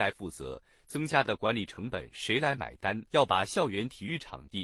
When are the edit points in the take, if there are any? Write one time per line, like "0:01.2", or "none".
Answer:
0:03.1